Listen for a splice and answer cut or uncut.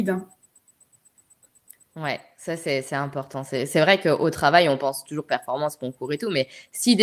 uncut